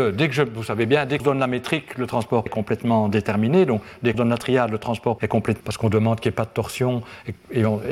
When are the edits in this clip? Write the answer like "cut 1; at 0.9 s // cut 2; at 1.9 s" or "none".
cut 1; at 1.2 s // cut 2; at 2.5 s // cut 3; at 4.1 s // cut 4; at 5.2 s // cut 5; at 5.6 s